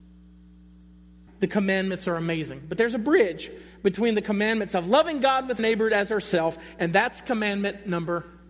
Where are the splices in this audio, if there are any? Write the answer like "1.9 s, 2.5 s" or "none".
1.3 s, 5.6 s